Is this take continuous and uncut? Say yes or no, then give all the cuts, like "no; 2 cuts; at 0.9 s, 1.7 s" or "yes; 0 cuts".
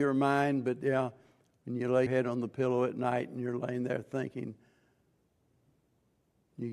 no; 1 cut; at 2.1 s